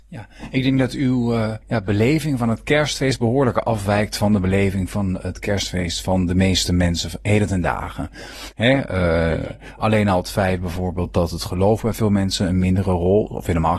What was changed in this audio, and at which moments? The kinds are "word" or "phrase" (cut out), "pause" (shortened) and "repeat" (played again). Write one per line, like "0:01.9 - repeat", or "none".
0:01.6 - pause